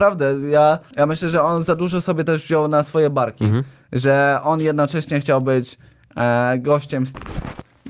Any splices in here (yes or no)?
no